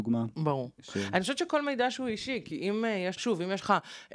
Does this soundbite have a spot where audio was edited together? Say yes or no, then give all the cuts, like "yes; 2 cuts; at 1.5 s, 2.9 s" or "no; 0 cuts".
yes; 1 cut; at 3.2 s